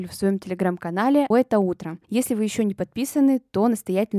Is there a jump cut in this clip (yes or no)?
yes